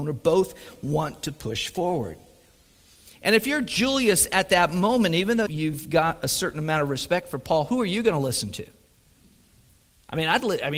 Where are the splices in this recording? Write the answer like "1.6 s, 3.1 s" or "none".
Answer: 5.5 s